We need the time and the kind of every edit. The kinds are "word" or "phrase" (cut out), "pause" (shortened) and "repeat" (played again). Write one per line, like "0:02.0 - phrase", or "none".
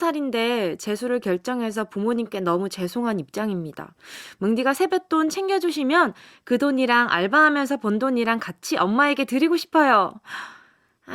none